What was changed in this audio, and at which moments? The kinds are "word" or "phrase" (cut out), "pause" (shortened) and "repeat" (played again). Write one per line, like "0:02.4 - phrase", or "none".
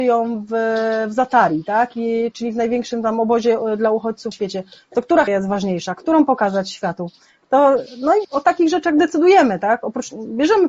0:04.3 - word
0:05.3 - word
0:08.2 - word